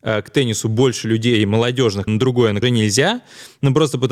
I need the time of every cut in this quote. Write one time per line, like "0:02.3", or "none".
0:02.1
0:02.6